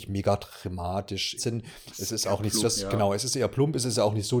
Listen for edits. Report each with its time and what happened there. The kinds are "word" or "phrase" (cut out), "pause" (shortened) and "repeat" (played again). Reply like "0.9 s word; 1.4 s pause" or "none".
1.4 s word; 2.6 s word